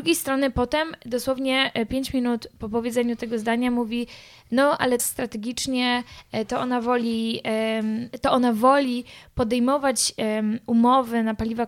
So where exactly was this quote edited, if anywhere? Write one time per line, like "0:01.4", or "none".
0:05.0